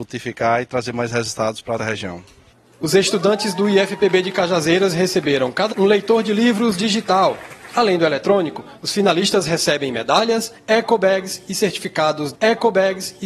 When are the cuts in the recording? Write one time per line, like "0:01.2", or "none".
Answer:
0:01.8
0:05.7
0:12.3